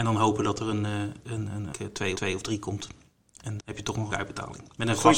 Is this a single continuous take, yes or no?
no